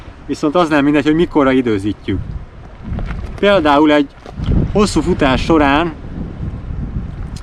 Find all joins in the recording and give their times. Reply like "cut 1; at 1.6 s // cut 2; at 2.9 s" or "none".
none